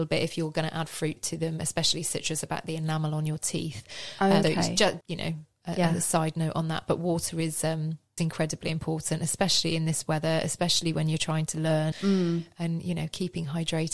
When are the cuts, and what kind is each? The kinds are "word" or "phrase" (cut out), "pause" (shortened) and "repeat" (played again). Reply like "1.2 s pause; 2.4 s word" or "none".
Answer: 1.2 s word; 4.4 s word; 5.0 s word; 8.2 s word; 11.9 s word